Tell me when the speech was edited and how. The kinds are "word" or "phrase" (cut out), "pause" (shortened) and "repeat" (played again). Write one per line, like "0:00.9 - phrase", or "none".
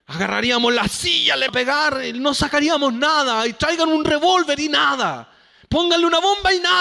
0:01.5 - word